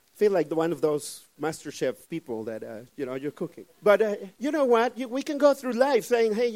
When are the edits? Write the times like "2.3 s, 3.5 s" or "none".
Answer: 2.0 s, 3.7 s, 4.3 s